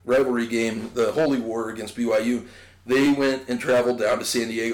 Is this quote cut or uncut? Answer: uncut